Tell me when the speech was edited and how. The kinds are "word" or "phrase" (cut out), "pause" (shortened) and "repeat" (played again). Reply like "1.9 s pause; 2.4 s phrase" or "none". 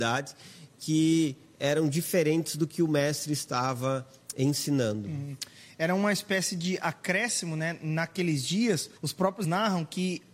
9.0 s pause; 9.4 s word